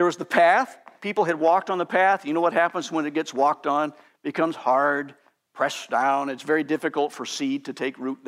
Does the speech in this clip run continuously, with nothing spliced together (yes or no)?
yes